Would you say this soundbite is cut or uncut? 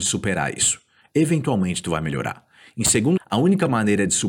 cut